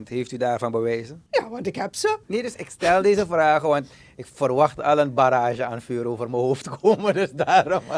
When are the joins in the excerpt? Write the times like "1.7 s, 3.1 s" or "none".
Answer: 1.3 s, 2.2 s